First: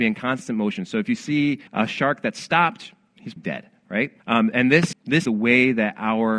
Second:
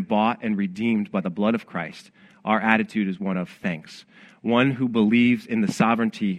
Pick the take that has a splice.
first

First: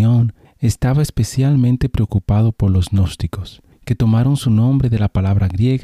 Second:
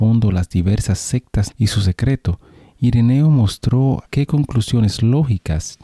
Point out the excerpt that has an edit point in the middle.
second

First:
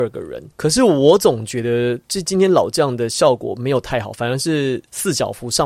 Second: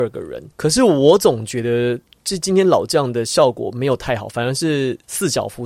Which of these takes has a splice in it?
first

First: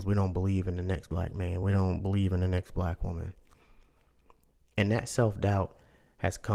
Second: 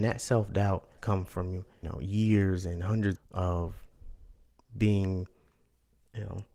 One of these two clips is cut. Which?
second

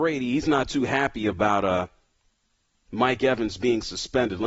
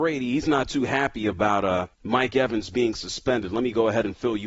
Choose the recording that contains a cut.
second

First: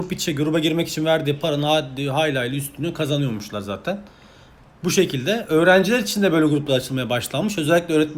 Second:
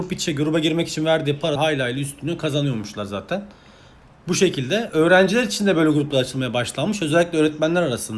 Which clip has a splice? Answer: second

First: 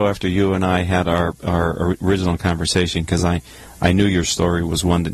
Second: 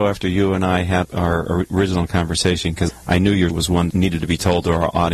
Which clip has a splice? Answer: second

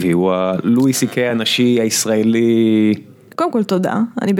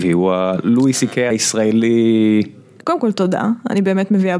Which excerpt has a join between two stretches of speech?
second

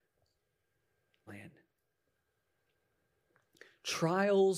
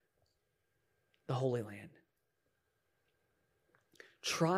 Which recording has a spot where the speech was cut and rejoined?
first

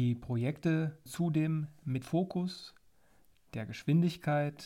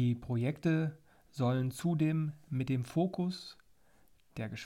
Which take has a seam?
first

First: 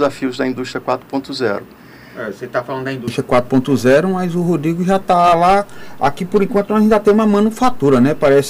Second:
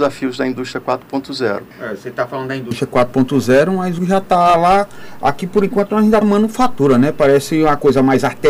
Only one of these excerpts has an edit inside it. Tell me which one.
second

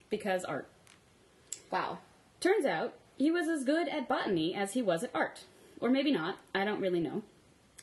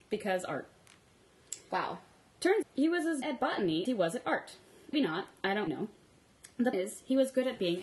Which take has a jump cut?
second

